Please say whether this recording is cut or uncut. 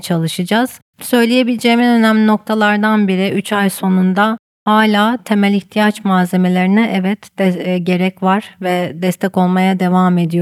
uncut